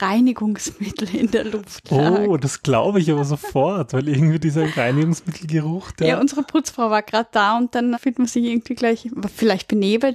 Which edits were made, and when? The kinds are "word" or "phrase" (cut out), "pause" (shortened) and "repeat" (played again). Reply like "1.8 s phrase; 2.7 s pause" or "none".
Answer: 7.9 s word